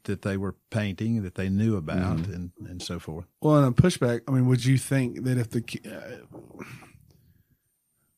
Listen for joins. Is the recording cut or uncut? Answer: uncut